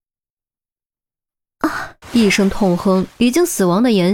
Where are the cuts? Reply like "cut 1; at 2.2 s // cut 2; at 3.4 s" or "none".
cut 1; at 2.0 s